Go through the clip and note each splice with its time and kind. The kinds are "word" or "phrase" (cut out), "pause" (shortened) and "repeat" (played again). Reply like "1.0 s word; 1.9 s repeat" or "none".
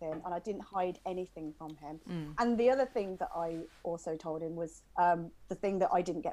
4.9 s pause